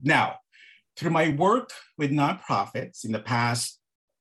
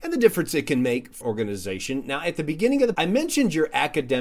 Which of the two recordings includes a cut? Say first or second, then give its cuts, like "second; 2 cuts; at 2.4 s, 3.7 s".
second; 2 cuts; at 1.2 s, 2.9 s